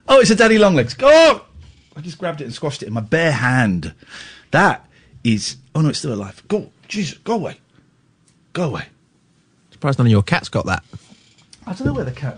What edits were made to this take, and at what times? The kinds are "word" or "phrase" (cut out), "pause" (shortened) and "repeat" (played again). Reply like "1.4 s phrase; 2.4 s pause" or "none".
none

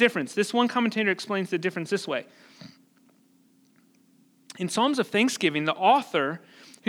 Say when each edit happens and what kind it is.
none

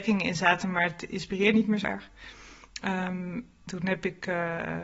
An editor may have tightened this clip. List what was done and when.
1.5 s word; 1.8 s word; 3.7 s word

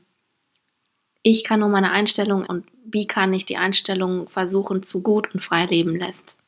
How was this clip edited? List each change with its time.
2.4 s word; 5.0 s phrase

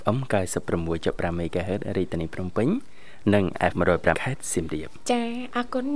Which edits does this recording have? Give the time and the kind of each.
3.7 s word; 4.1 s word

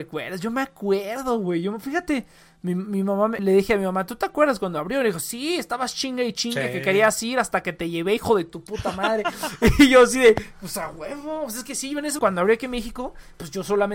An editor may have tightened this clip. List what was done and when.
3.4 s word; 12.2 s word

